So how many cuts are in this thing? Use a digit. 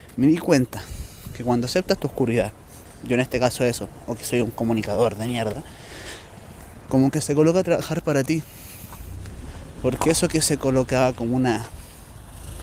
0